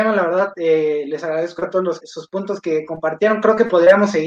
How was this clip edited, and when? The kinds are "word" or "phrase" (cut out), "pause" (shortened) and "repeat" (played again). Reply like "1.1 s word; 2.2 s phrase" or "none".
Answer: 2.0 s word